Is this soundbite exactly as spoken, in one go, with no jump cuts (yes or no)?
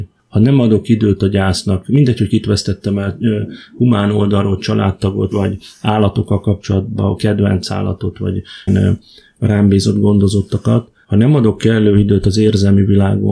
no